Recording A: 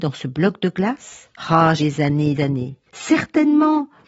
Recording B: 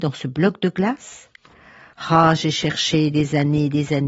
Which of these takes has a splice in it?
A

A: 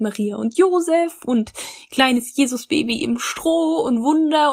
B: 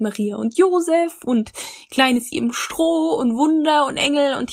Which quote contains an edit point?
B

